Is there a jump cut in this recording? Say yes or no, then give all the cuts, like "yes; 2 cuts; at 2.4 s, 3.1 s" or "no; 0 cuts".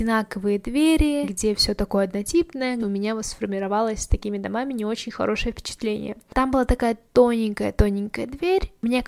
no; 0 cuts